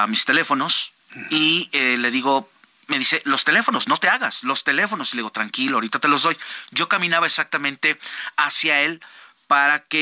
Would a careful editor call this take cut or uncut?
uncut